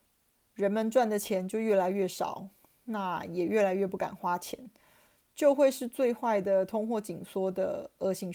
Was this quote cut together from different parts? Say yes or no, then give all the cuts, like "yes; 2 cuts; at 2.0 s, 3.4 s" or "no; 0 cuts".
no; 0 cuts